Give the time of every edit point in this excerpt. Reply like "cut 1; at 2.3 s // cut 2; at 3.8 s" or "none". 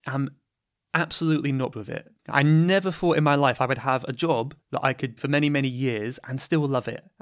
cut 1; at 1.7 s // cut 2; at 2.2 s // cut 3; at 4.6 s // cut 4; at 5.2 s